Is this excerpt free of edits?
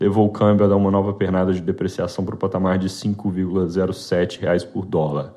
yes; 0 cuts

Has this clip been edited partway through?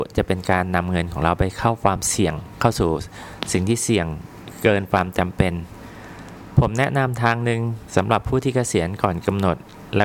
no; 0 cuts

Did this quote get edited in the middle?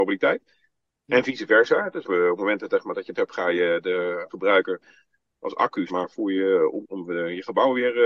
yes; 5 cuts; at 2.0 s, 3.1 s, 4.3 s, 5.9 s, 6.8 s

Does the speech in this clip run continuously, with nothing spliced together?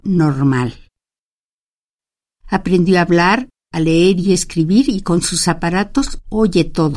yes; 0 cuts

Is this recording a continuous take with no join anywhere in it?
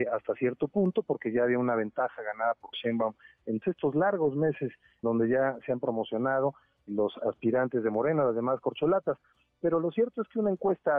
no; 4 cuts; at 2.7 s, 3.6 s, 5.0 s, 6.9 s

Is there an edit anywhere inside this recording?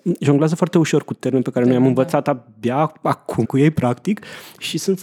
yes; 1 cut; at 3.4 s

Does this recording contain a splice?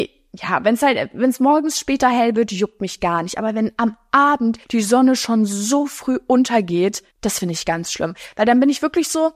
yes; 2 cuts; at 4.6 s, 7.1 s

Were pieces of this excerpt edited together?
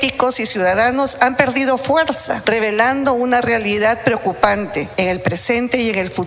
no; 0 cuts

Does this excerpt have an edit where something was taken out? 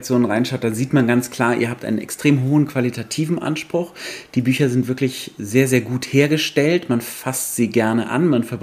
no; 0 cuts

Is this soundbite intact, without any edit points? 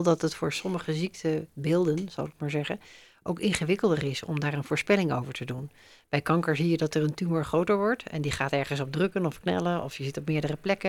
yes; 0 cuts

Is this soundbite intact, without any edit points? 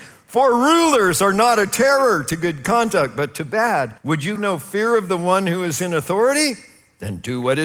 no; 2 cuts; at 4.0 s, 4.4 s

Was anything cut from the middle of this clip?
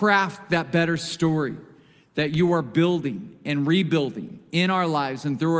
no; 0 cuts

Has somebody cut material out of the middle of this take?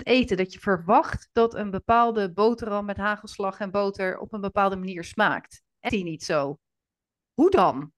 yes; 1 cut; at 5.9 s

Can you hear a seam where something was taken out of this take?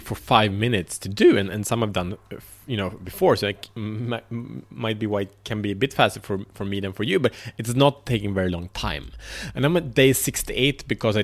no; 0 cuts

